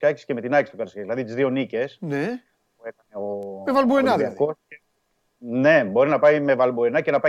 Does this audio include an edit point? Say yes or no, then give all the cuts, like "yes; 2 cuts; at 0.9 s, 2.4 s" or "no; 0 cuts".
no; 0 cuts